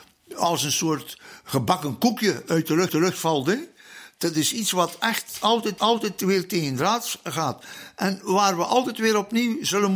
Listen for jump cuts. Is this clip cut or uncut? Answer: cut